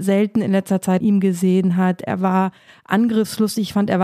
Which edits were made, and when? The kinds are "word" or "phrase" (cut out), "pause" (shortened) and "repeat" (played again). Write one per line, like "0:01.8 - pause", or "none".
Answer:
0:01.0 - word